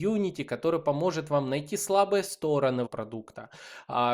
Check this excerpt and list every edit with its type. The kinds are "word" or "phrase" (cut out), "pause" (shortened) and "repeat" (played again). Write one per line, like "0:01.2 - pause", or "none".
0:02.9 - word